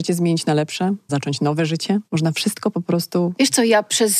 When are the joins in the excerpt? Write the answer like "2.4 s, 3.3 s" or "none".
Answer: 1.1 s, 2.1 s

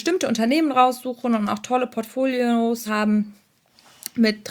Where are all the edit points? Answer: 2.9 s

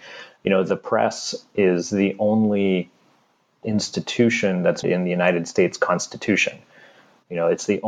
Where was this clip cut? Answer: 3.6 s, 4.8 s

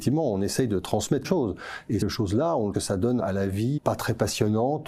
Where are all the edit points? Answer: 1.2 s, 2.0 s, 2.7 s, 3.2 s, 3.8 s

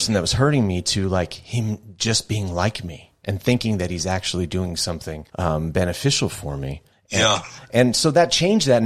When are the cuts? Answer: 5.3 s, 6.9 s

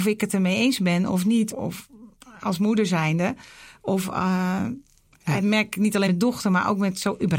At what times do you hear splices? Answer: 1.5 s, 5.4 s, 6.1 s

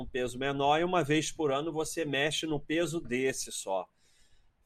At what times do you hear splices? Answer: none

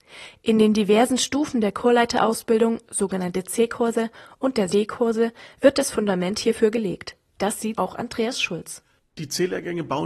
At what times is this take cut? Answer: 4.7 s, 7.8 s

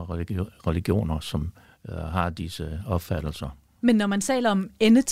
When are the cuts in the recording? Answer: 1.6 s

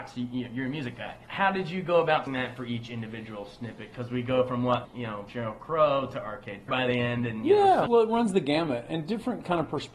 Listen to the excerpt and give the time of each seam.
1.2 s, 2.3 s, 4.8 s, 6.7 s

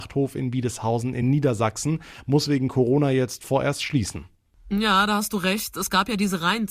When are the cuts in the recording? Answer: none

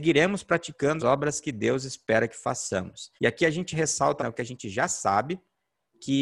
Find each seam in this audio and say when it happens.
1.0 s, 3.2 s, 4.2 s

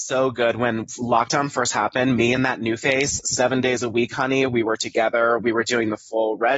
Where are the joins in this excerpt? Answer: none

